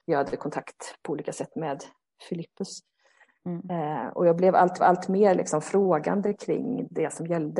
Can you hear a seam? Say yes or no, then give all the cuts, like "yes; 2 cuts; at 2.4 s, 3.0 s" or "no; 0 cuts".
yes; 1 cut; at 4.8 s